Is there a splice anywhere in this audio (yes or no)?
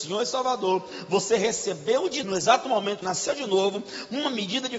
yes